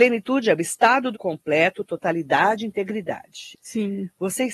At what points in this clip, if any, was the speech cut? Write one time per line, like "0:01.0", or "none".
0:01.1
0:03.5